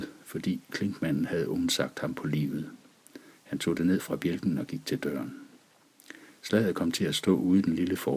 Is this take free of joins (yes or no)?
yes